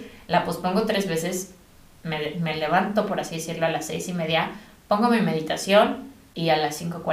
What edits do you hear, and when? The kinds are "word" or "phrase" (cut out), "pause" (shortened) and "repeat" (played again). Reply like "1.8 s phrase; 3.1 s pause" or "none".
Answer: none